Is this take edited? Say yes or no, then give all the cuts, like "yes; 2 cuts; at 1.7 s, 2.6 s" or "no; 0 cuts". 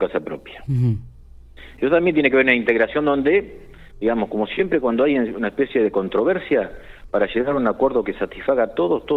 no; 0 cuts